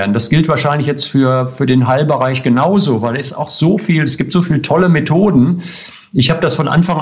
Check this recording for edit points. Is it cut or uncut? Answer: uncut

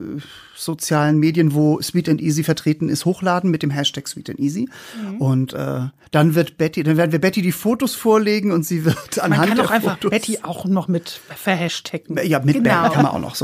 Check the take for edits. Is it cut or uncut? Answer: uncut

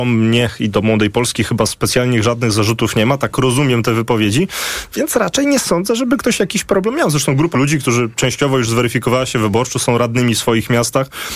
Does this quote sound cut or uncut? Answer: cut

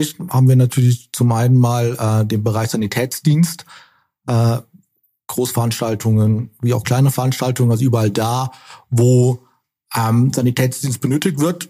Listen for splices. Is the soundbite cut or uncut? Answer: uncut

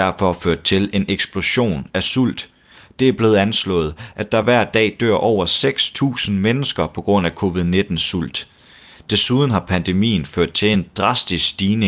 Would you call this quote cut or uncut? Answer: uncut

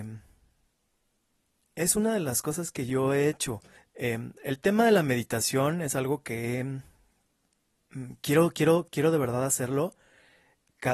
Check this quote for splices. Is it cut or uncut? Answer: cut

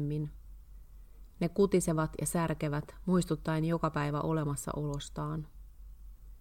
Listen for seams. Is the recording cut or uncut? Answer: uncut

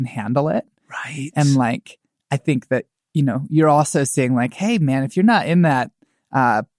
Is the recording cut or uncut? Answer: uncut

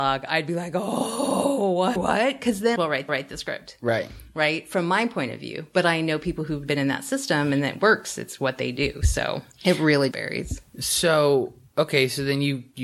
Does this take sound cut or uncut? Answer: cut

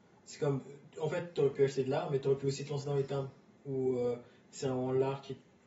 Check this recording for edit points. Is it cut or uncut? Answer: uncut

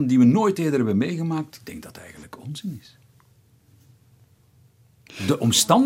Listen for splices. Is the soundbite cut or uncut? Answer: cut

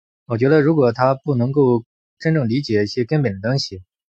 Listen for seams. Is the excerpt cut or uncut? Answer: uncut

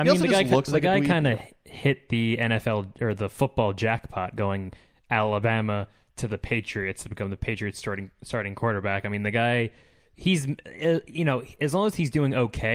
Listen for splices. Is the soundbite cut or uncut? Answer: uncut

